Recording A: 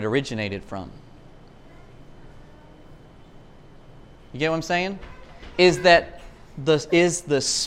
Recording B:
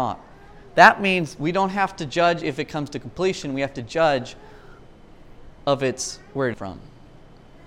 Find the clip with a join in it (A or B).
B